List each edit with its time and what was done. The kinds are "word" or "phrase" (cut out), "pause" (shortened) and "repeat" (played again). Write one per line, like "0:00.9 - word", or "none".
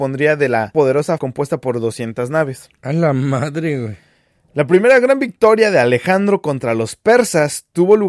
0:01.2 - word